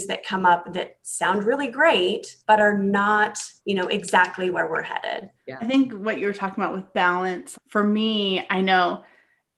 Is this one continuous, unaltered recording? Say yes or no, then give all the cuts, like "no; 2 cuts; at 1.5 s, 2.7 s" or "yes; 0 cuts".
no; 4 cuts; at 2.4 s, 3.6 s, 5.4 s, 7.5 s